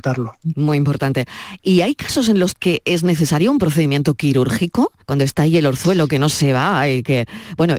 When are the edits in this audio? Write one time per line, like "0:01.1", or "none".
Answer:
0:05.0